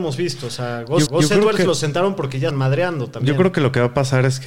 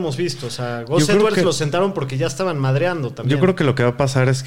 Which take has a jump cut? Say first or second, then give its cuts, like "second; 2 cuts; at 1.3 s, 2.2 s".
first; 2 cuts; at 1.1 s, 2.5 s